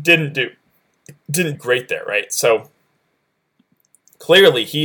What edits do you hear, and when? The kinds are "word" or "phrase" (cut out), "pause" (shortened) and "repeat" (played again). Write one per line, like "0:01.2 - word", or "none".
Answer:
0:01.5 - word